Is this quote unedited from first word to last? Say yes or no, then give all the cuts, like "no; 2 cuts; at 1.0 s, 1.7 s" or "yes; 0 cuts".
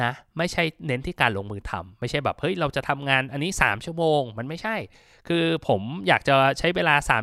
yes; 0 cuts